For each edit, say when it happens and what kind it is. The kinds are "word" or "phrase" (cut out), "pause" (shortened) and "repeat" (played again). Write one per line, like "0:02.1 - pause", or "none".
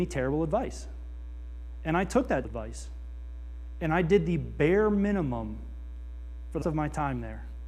0:02.4 - word
0:06.6 - word